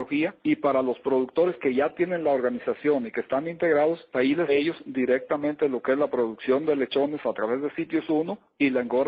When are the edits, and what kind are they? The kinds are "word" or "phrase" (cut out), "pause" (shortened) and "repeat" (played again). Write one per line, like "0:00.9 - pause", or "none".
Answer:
0:04.1 - word
0:04.5 - phrase